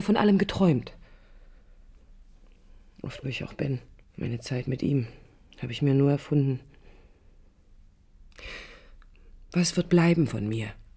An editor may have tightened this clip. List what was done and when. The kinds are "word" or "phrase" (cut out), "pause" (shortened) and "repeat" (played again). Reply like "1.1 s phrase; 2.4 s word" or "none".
3.2 s word; 4.0 s pause; 5.4 s pause